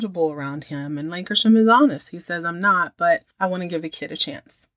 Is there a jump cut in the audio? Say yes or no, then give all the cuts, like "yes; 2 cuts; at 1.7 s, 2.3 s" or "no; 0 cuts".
yes; 1 cut; at 3.3 s